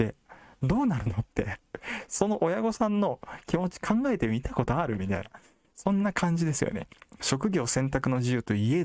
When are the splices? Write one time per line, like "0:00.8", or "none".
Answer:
none